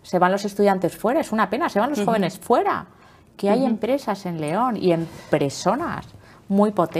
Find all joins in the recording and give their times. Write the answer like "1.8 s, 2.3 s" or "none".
none